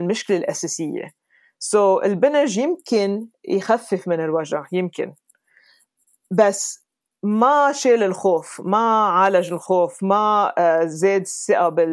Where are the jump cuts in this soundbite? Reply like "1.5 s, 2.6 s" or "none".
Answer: none